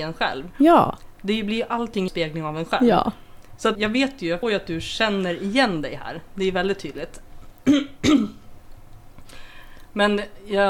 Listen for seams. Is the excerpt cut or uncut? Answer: cut